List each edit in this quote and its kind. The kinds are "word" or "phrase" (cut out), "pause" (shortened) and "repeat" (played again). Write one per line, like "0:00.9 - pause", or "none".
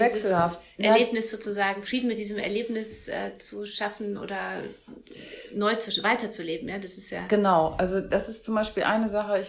none